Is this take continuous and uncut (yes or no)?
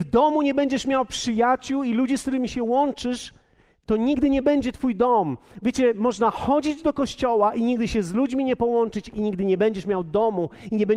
yes